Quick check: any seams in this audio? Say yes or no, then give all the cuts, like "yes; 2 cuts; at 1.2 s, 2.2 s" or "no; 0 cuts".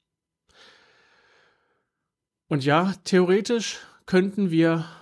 no; 0 cuts